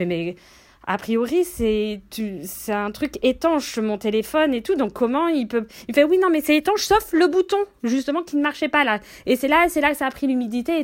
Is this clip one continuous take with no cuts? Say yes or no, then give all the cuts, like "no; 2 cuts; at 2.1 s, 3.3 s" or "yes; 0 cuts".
yes; 0 cuts